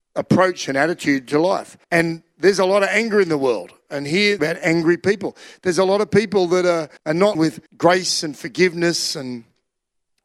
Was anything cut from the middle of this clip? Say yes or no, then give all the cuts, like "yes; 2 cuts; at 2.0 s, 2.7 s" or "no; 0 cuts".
yes; 5 cuts; at 1.8 s, 4.4 s, 7.0 s, 7.3 s, 7.7 s